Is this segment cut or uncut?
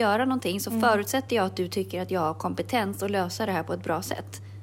uncut